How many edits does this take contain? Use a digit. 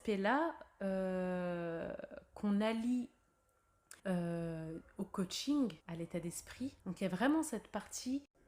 3